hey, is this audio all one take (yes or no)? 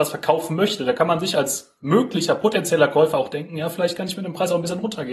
yes